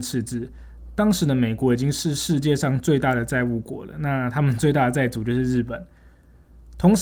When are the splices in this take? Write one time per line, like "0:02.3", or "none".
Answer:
none